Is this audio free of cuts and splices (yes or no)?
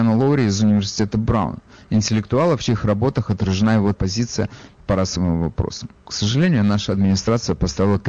no